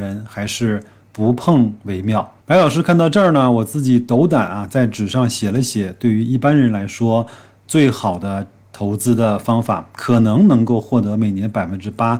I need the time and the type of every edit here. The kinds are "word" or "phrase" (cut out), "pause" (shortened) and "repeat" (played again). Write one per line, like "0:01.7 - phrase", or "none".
none